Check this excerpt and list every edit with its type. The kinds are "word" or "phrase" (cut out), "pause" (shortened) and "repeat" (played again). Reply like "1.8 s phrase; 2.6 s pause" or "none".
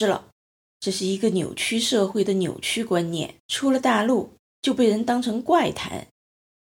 3.4 s pause